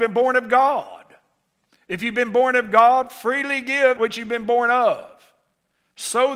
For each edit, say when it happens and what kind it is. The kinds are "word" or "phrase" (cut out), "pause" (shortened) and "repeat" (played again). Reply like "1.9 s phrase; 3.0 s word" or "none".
4.0 s word